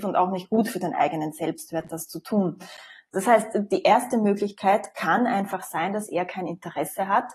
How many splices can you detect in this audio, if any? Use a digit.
0